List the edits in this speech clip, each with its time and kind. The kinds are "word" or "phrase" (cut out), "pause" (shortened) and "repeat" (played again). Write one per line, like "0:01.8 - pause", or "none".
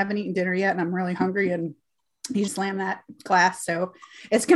0:02.5 - phrase